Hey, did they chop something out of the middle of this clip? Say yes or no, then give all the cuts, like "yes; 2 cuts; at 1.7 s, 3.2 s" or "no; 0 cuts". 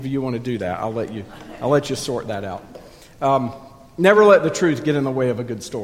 no; 0 cuts